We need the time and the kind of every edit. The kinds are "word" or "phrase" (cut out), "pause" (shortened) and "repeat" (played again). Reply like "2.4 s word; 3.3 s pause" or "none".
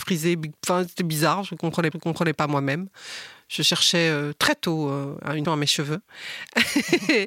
1.9 s repeat; 5.4 s word